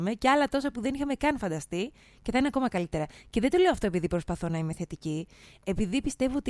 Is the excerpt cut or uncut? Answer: uncut